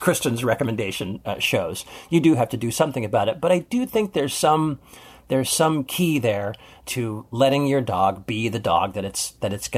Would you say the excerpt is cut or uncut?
uncut